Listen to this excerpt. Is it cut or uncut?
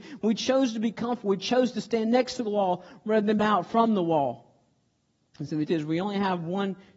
cut